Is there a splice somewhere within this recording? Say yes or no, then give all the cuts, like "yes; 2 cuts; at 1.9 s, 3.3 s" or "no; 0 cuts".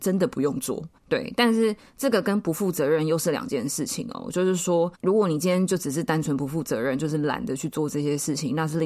yes; 2 cuts; at 1.0 s, 4.9 s